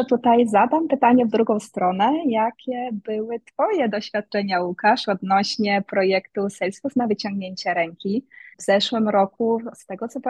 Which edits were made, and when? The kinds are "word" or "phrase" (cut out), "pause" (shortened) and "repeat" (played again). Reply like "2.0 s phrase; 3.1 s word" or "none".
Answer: 8.5 s pause